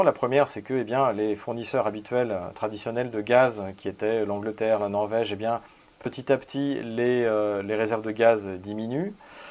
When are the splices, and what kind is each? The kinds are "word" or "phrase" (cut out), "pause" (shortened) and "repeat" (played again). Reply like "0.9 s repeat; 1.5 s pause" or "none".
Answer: none